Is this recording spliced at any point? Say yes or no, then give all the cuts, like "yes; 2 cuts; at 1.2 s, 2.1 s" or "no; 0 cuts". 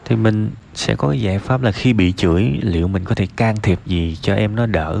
no; 0 cuts